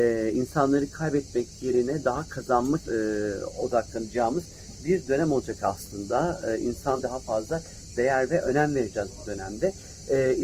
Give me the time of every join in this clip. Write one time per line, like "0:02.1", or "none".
0:02.9
0:07.0